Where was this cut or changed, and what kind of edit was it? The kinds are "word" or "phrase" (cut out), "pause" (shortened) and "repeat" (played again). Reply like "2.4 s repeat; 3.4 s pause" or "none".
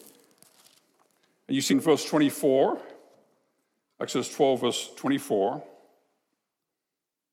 1.7 s word